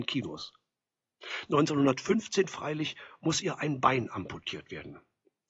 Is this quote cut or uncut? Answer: uncut